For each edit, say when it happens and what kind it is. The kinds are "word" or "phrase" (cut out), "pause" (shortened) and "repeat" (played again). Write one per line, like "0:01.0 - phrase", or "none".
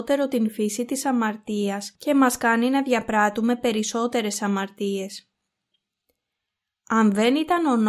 none